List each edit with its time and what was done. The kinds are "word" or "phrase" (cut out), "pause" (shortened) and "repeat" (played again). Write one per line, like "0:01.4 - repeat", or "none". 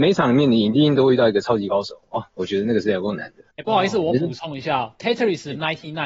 0:03.5 - pause

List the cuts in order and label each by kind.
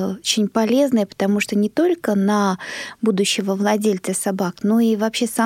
none

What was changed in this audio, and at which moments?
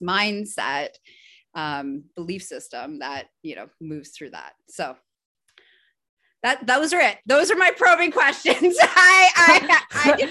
none

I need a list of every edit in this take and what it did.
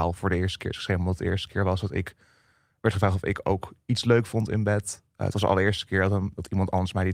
none

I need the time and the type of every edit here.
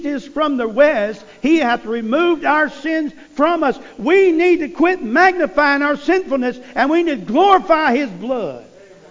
none

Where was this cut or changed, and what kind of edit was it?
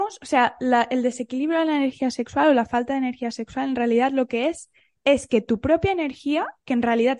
none

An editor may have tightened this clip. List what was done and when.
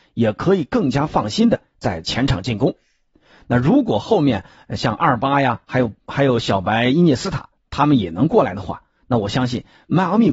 none

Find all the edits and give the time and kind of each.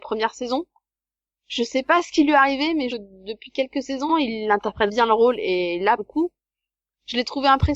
0:02.9 - phrase
0:04.1 - word
0:04.9 - word
0:06.0 - word

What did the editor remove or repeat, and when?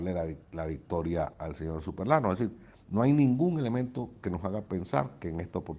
none

